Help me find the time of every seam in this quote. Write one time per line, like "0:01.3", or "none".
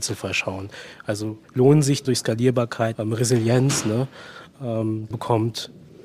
0:01.4
0:02.0
0:02.9
0:05.1

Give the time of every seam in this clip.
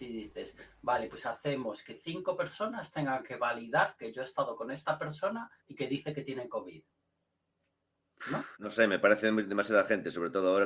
0:05.6
0:08.5

